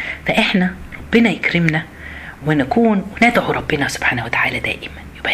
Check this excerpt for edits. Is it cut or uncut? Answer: uncut